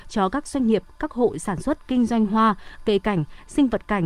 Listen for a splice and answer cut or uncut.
uncut